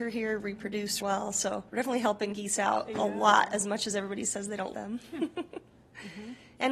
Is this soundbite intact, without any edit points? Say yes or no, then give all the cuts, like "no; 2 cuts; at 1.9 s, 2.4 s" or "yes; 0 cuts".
no; 3 cuts; at 1.0 s, 1.7 s, 4.7 s